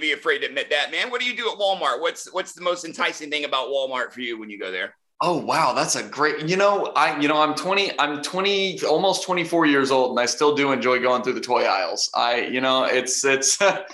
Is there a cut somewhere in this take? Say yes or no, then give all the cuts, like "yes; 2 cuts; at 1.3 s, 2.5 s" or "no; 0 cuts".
no; 0 cuts